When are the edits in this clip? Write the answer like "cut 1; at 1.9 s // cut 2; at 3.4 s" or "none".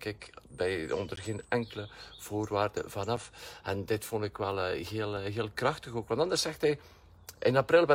none